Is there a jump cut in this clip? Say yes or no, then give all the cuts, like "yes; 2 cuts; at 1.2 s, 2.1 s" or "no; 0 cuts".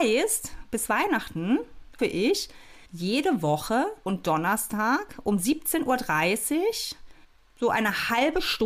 yes; 4 cuts; at 2.0 s, 2.8 s, 4.0 s, 7.2 s